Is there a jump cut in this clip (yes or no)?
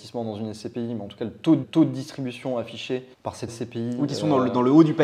yes